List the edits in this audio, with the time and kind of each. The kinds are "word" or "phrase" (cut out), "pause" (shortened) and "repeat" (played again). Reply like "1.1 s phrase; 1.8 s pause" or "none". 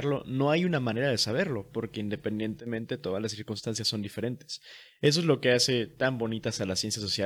none